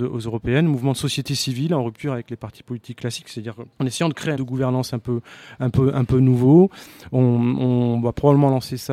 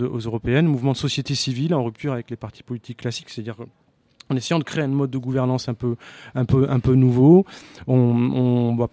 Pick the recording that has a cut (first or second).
first